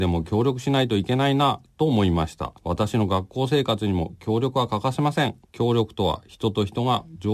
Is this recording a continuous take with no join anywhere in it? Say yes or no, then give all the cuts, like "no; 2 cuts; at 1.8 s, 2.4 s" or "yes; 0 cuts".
no; 2 cuts; at 2.6 s, 5.4 s